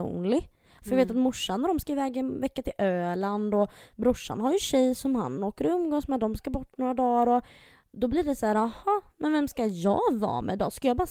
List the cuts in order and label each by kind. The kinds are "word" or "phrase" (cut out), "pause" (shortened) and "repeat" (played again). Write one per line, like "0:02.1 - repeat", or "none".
none